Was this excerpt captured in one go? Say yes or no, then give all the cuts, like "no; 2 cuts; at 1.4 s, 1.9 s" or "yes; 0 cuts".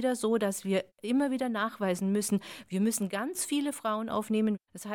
yes; 0 cuts